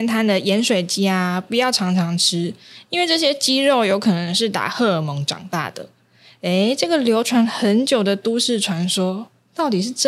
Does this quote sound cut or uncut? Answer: uncut